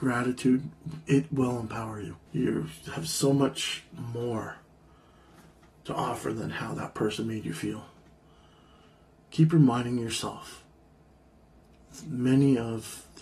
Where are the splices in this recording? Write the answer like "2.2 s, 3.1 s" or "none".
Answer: 2.3 s

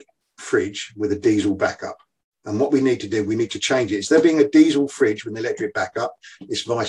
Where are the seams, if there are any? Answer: none

